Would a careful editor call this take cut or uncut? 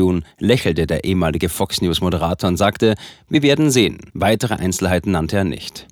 cut